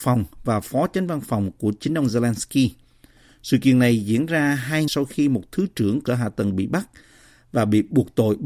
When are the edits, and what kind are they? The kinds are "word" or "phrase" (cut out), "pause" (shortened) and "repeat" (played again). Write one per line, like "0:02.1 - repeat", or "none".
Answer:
0:04.9 - word
0:06.1 - word